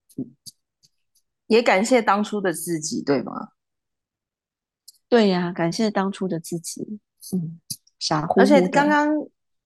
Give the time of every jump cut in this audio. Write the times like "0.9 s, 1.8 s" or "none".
none